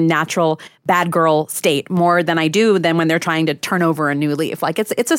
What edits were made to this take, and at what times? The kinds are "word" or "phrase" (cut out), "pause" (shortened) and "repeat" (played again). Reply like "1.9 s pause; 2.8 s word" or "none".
3.6 s word